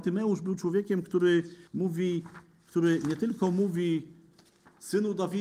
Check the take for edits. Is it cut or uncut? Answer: cut